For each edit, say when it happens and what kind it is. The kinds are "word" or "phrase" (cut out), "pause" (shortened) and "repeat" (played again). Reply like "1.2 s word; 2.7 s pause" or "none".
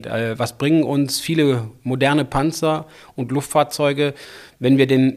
none